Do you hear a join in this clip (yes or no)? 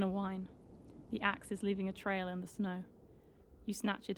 no